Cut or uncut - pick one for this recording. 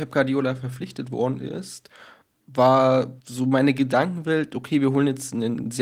cut